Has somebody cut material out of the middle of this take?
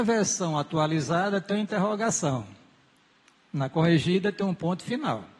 no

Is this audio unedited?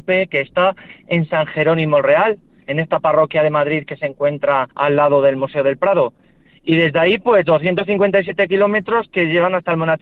no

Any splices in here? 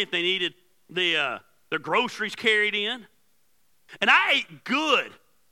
no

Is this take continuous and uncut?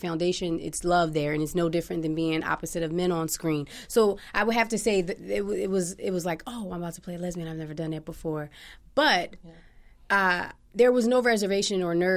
yes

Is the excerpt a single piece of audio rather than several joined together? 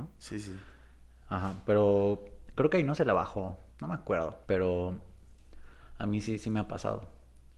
no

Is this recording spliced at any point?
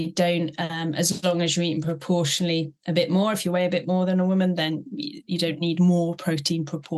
no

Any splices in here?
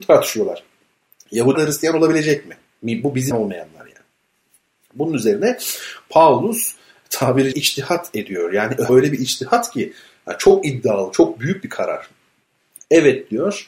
yes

